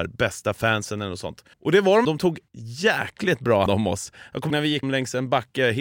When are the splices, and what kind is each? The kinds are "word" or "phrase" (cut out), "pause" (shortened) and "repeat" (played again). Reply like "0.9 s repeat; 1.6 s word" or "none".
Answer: 1.5 s pause; 2.0 s word; 2.5 s pause; 3.7 s word; 4.5 s word; 4.8 s word